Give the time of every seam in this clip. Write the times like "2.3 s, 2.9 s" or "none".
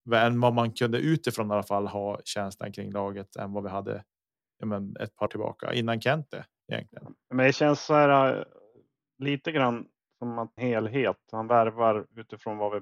5.3 s, 7.2 s, 10.6 s